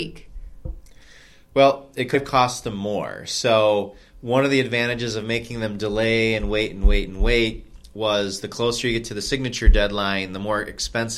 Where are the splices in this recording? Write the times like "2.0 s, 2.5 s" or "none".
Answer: 2.1 s